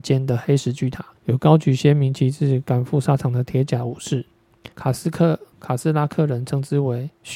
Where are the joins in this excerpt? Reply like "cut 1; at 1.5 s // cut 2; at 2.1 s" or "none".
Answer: cut 1; at 1.2 s // cut 2; at 4.7 s // cut 3; at 5.5 s

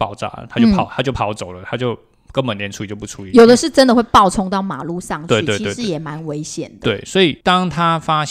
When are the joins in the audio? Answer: cut 1; at 7.4 s

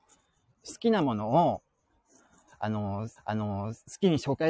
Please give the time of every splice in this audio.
cut 1; at 3.2 s

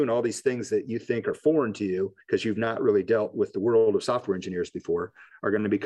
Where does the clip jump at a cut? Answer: cut 1; at 2.2 s

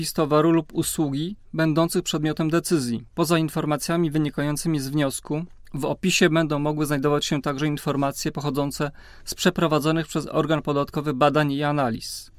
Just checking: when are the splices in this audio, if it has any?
cut 1; at 3.1 s

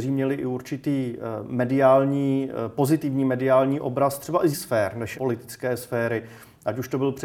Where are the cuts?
cut 1; at 4.5 s // cut 2; at 5.1 s

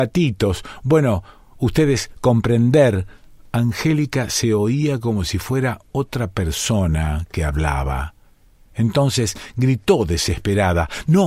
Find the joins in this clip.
none

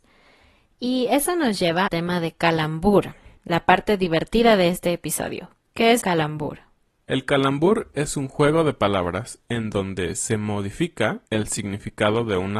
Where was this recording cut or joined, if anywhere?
cut 1; at 1.9 s // cut 2; at 3.4 s // cut 3; at 6.0 s // cut 4; at 11.3 s

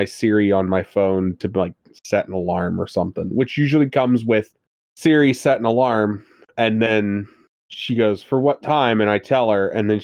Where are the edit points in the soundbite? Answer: none

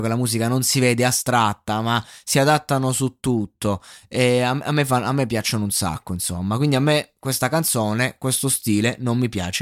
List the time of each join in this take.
none

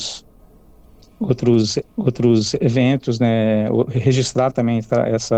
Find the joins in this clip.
cut 1; at 1.8 s

